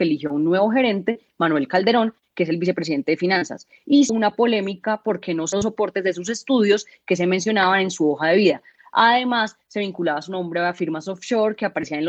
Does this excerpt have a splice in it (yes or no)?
yes